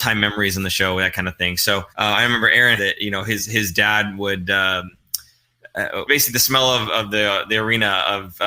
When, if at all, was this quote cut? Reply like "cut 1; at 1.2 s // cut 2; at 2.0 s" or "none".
cut 1; at 1.9 s // cut 2; at 2.8 s // cut 3; at 6.1 s // cut 4; at 6.8 s